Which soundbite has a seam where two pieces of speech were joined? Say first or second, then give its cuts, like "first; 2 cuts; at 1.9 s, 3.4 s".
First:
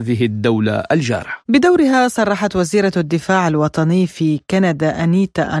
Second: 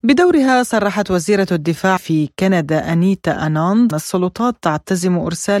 second; 2 cuts; at 2.0 s, 3.9 s